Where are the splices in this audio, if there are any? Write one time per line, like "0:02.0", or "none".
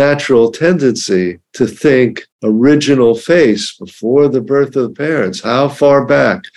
0:01.4
0:02.3